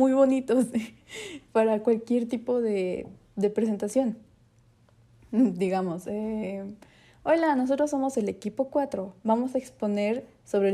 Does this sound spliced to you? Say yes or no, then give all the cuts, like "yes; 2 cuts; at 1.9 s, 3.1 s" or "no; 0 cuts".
no; 0 cuts